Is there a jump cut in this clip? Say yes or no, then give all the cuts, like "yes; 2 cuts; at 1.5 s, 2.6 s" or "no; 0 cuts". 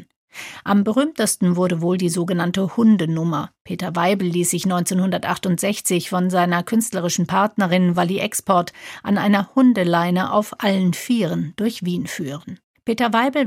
no; 0 cuts